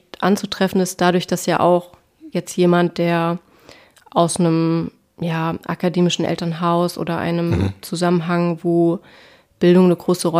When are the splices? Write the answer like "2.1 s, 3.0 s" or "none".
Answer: none

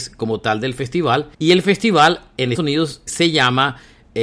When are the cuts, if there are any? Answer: 1.3 s, 2.5 s, 3.1 s

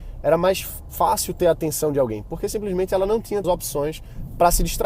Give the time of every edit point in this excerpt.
3.4 s

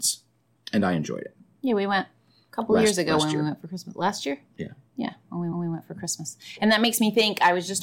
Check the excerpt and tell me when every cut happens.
5.5 s

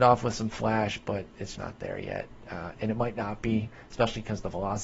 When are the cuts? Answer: 1.5 s

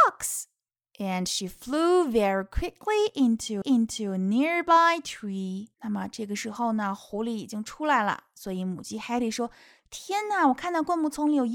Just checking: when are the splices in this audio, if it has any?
3.6 s, 5.7 s

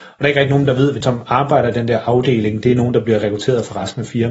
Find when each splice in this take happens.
1.0 s

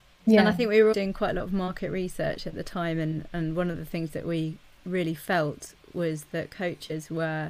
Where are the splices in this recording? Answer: 0.9 s

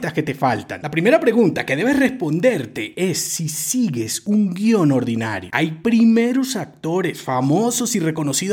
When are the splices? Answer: none

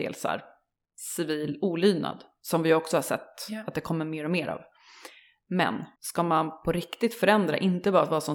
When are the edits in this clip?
6.0 s

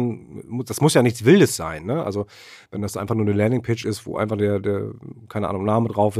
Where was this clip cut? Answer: none

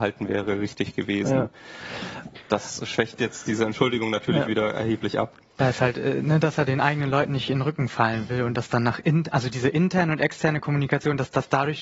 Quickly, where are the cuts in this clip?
none

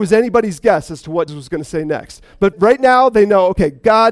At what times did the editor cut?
1.3 s, 2.5 s

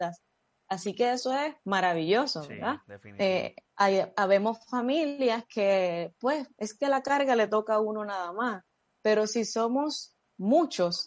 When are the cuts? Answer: 1.6 s, 3.7 s, 6.5 s

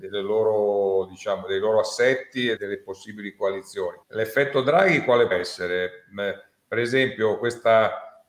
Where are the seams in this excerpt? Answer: 2.6 s, 4.0 s, 5.3 s

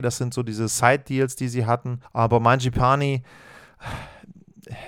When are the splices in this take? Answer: 2.0 s

